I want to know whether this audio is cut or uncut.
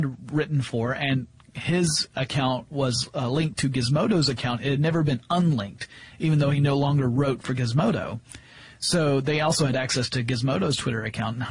uncut